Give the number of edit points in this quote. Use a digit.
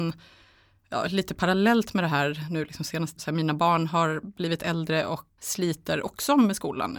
2